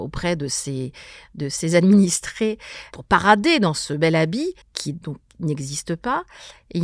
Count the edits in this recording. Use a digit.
1